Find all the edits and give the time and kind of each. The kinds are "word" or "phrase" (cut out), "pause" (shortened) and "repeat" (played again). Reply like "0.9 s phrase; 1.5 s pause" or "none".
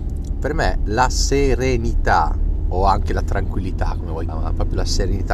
4.3 s word